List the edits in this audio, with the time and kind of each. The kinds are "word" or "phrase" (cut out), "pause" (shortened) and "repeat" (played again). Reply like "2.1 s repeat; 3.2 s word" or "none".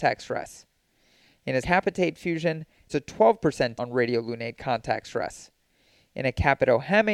1.6 s word; 2.9 s word; 3.8 s word